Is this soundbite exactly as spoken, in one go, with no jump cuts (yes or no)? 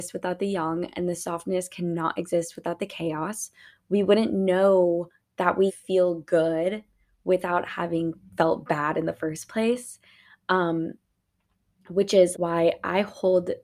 no